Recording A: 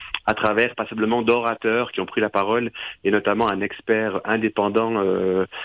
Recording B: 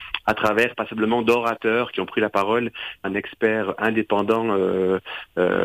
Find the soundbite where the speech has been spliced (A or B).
B